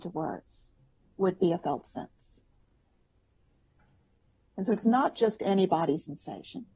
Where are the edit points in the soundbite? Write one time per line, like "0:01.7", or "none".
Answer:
none